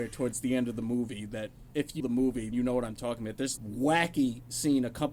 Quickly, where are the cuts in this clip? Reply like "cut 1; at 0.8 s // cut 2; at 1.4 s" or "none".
cut 1; at 2.0 s // cut 2; at 2.5 s // cut 3; at 3.6 s